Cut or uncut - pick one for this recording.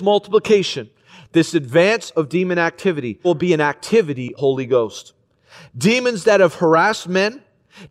cut